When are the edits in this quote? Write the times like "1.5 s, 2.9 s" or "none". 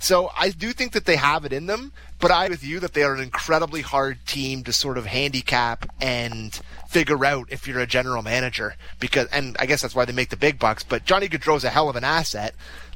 2.5 s